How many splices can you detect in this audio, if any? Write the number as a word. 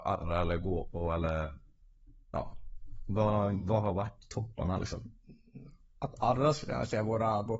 zero